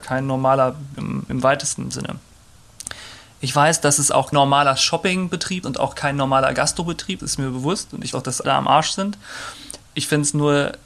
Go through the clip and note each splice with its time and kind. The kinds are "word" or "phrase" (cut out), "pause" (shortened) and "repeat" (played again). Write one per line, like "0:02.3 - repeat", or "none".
0:00.9 - word
0:01.3 - word
0:04.3 - word
0:05.6 - word
0:07.2 - word
0:08.1 - word
0:08.4 - word

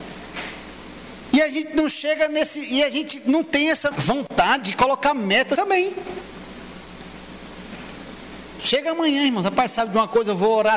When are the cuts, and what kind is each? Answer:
0:03.9 - word
0:05.6 - word

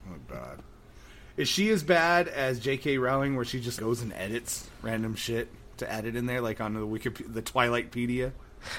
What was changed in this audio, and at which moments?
0:03.8 - word

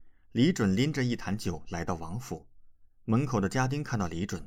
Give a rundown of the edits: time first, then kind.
0:02.9 - pause

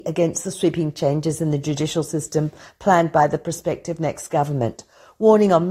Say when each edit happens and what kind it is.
none

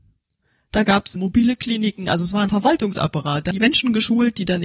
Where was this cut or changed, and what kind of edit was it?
0:01.2 - word
0:02.5 - word
0:03.5 - word

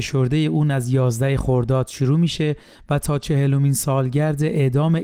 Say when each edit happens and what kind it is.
none

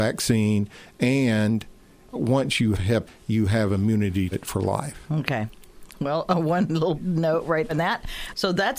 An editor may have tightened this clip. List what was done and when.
0:02.7 - word
0:03.1 - word
0:04.3 - word
0:07.0 - word
0:07.7 - word

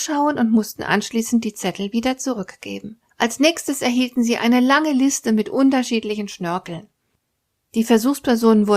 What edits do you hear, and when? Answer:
0:03.1 - pause

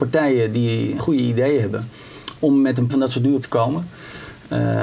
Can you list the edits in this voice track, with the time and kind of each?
0:01.0 - word
0:02.9 - word
0:03.4 - word

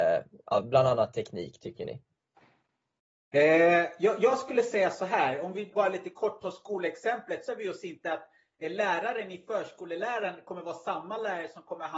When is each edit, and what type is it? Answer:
0:05.7 - word
0:07.5 - word

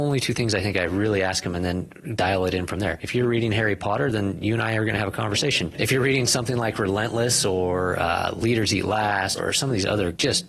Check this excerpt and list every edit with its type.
0:09.4 - word

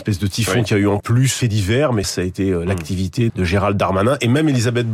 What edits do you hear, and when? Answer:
0:01.0 - word
0:01.4 - word
0:02.0 - word
0:03.3 - word

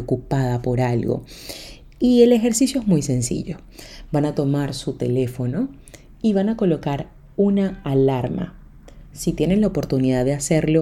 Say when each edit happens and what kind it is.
none

